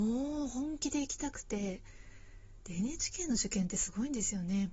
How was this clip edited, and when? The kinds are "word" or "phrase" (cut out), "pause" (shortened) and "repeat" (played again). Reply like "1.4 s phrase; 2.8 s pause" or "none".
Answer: none

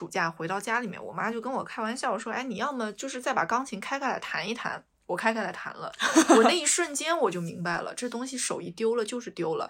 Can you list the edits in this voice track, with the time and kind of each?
none

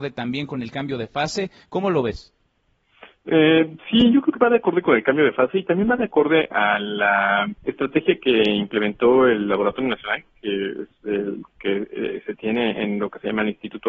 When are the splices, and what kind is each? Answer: 6.5 s word; 7.6 s pause

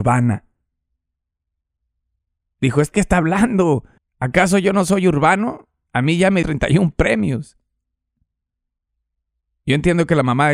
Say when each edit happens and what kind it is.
2.9 s phrase; 4.0 s pause; 6.4 s word

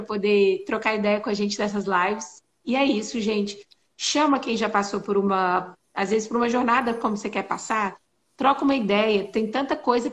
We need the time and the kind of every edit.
none

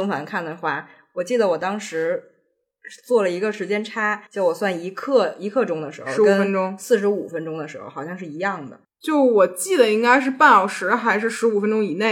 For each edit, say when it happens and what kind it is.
4.3 s pause

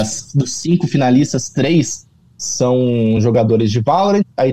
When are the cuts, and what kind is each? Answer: none

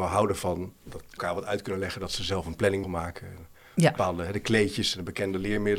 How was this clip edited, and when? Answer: 1.2 s word; 2.8 s word

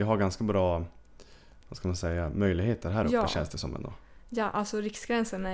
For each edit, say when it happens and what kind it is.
none

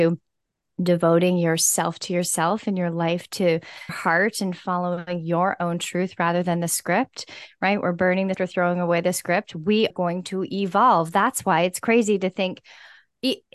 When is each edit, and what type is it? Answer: 3.9 s word; 8.3 s word; 9.9 s word

